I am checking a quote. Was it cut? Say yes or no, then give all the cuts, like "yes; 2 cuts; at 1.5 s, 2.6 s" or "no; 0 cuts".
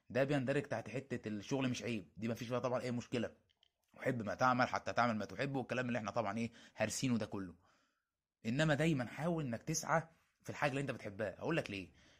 no; 0 cuts